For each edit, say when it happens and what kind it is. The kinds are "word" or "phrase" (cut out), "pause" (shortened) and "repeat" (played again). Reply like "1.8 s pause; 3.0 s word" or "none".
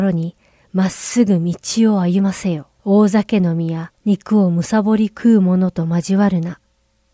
2.7 s pause; 4.0 s pause